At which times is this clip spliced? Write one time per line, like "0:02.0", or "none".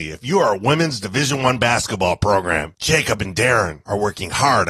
none